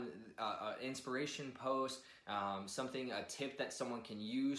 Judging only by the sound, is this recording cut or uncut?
uncut